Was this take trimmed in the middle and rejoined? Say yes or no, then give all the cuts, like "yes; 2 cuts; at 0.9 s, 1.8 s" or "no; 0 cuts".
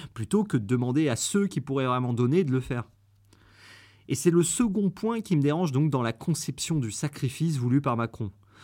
no; 0 cuts